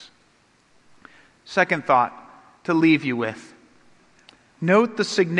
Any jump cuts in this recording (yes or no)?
no